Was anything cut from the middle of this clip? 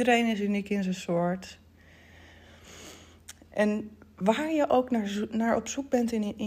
no; 0 cuts

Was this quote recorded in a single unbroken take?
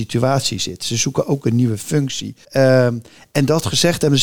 no; 1 cut; at 2.4 s

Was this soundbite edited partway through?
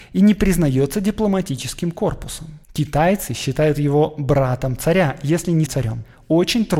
yes; 2 cuts; at 2.6 s, 5.7 s

